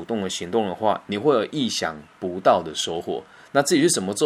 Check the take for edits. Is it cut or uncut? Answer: uncut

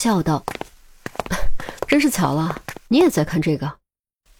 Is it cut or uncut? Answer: cut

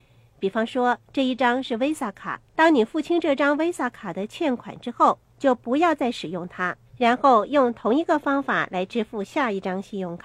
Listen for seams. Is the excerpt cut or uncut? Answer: cut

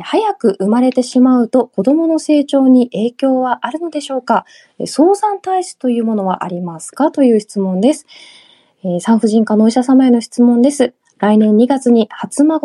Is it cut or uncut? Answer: uncut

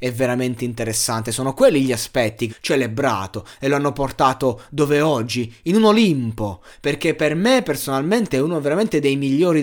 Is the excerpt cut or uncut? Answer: cut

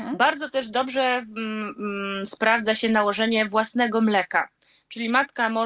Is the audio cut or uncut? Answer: uncut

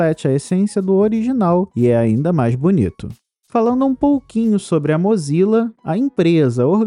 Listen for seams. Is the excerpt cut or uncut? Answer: uncut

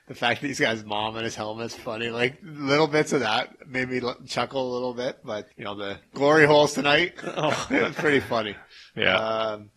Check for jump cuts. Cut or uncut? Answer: cut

